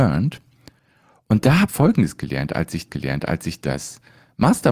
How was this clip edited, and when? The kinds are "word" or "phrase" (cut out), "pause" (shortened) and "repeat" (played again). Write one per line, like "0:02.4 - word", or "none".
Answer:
0:01.7 - word
0:02.9 - repeat